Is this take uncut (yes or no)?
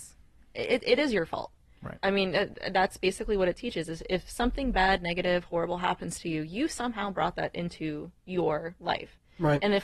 yes